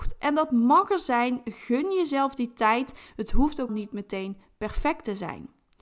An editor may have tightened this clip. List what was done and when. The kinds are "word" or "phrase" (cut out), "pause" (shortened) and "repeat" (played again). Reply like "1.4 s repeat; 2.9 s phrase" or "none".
3.7 s word